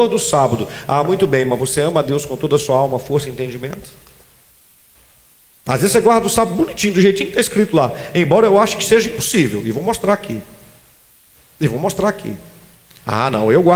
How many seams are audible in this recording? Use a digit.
1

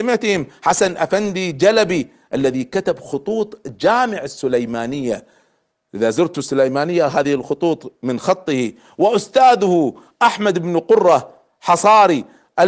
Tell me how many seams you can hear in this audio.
0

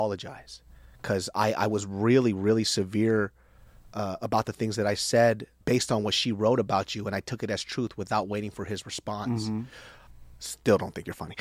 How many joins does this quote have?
1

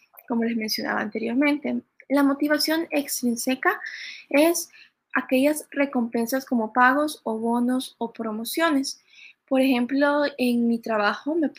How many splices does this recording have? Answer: 1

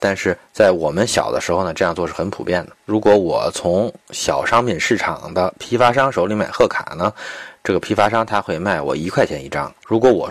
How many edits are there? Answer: 2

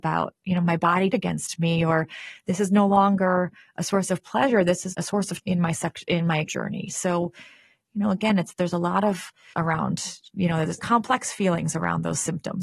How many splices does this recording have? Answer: 6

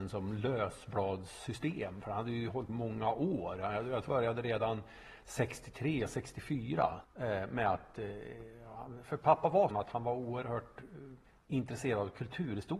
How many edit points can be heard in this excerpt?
3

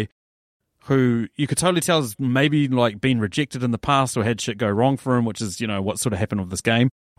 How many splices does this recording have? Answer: 0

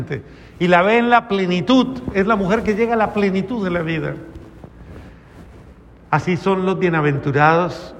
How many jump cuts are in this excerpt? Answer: 0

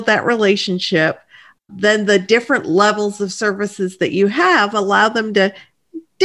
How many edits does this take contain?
0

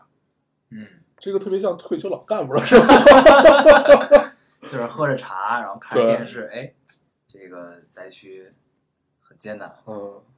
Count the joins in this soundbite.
1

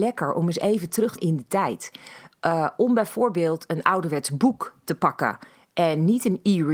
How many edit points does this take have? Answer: 1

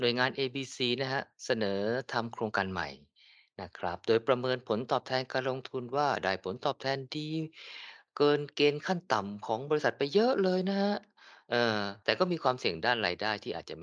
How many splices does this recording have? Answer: 1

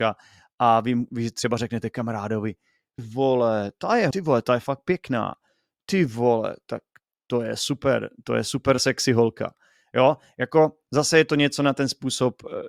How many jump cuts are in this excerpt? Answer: 2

